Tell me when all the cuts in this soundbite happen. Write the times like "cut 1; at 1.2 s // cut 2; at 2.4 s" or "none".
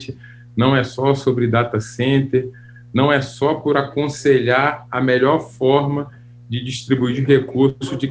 none